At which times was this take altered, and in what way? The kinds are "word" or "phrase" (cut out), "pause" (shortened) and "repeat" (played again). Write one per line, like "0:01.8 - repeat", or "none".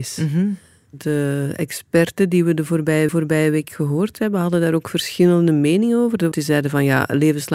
0:03.1 - repeat
0:06.3 - phrase